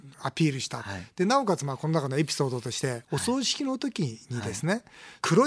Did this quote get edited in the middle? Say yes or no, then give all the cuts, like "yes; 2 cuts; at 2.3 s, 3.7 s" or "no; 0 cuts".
yes; 1 cut; at 3.0 s